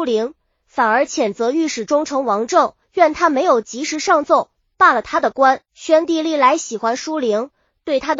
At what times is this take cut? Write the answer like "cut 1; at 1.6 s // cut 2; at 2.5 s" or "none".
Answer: cut 1; at 2.8 s // cut 2; at 5.7 s

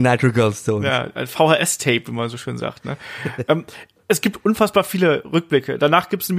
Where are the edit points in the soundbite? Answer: none

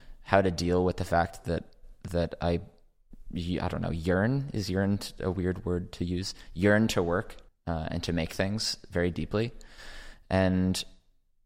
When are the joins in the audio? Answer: cut 1; at 7.5 s

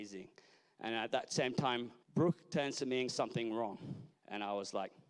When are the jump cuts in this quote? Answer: cut 1; at 2.0 s // cut 2; at 3.1 s // cut 3; at 4.2 s

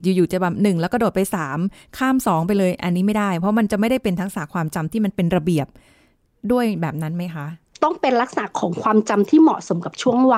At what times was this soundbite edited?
none

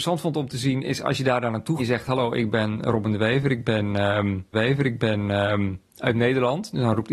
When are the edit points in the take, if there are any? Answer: cut 1; at 1.8 s // cut 2; at 4.5 s

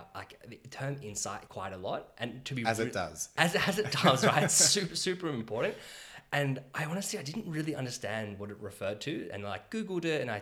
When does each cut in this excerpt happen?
cut 1; at 1.5 s

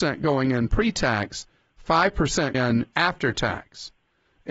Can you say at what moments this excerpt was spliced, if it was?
cut 1; at 2.5 s

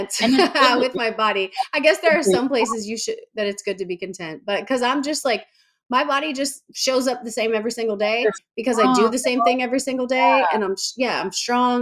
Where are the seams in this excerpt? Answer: none

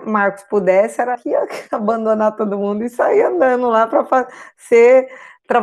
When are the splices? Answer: cut 1; at 1.1 s

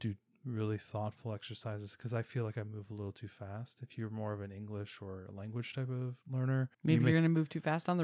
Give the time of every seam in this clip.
cut 1; at 6.7 s

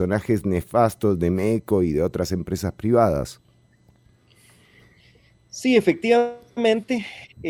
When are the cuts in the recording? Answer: none

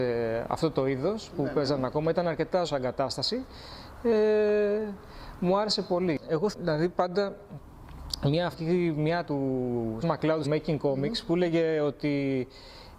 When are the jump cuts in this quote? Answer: cut 1; at 2.6 s // cut 2; at 6.5 s // cut 3; at 8.5 s // cut 4; at 9.2 s // cut 5; at 10.0 s // cut 6; at 10.4 s

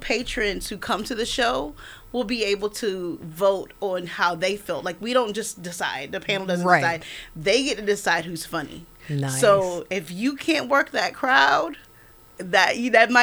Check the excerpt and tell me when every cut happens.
none

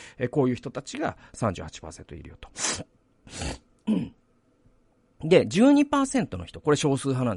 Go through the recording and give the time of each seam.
cut 1; at 2.9 s

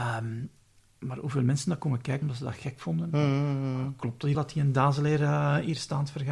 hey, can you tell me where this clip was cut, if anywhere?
cut 1; at 2.2 s // cut 2; at 4.3 s

